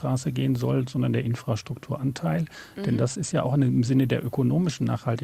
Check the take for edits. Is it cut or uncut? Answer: uncut